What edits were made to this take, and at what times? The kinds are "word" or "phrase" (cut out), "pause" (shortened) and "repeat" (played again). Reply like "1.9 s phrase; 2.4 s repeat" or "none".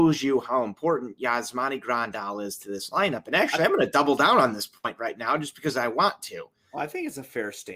none